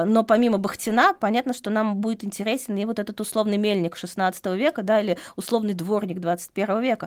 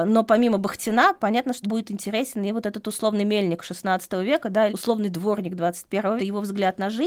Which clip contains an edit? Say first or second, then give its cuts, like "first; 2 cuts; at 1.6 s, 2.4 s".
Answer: second; 3 cuts; at 1.6 s, 4.7 s, 6.2 s